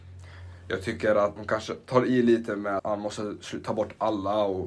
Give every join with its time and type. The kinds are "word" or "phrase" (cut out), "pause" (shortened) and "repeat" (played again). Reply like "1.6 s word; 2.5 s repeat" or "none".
1.4 s word; 2.8 s word

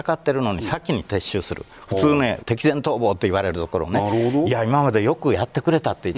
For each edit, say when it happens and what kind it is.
2.4 s phrase

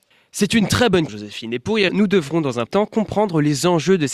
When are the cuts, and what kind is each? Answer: 1.1 s word; 1.9 s word; 2.7 s word

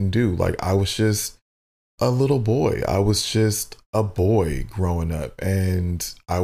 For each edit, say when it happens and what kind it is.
none

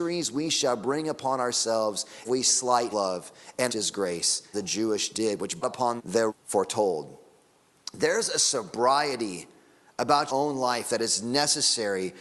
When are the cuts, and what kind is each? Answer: 2.2 s word; 2.9 s word; 3.7 s word; 4.5 s word; 5.1 s word; 5.6 s word; 6.0 s word; 6.3 s word; 10.3 s word

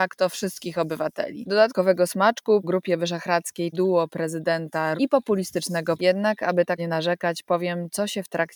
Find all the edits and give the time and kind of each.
2.6 s word; 3.7 s word; 5.0 s word; 6.0 s word; 6.8 s word

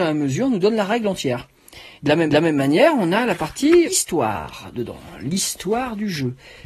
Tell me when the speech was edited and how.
2.0 s pause; 2.3 s repeat; 3.8 s word

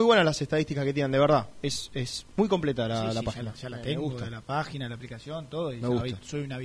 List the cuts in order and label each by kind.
none

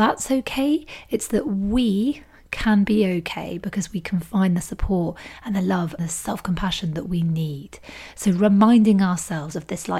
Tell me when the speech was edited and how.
6.0 s word

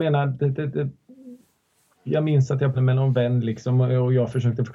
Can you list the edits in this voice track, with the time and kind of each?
2.7 s word

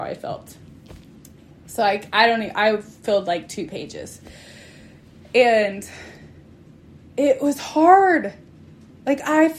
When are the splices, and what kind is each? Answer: none

